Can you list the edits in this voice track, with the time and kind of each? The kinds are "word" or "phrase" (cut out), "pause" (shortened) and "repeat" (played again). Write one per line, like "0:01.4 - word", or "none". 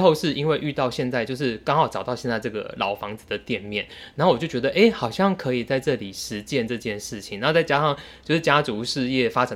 none